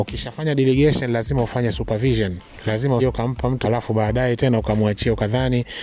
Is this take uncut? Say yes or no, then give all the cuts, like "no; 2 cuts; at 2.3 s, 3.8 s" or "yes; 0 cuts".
no; 2 cuts; at 3.0 s, 3.6 s